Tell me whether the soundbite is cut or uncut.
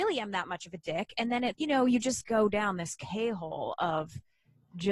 cut